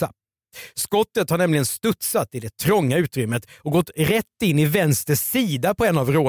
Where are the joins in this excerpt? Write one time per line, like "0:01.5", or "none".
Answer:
none